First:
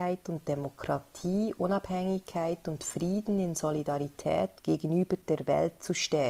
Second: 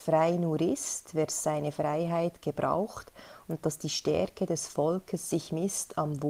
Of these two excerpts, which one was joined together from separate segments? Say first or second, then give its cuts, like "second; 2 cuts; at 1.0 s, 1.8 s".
first; 1 cut; at 4.6 s